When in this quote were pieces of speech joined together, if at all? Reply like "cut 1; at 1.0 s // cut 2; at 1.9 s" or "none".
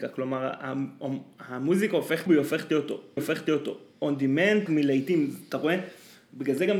cut 1; at 2.3 s // cut 2; at 3.2 s // cut 3; at 4.7 s